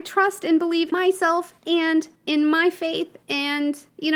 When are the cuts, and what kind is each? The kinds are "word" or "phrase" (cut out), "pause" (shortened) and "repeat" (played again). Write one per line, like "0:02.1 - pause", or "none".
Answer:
0:00.9 - word
0:01.6 - pause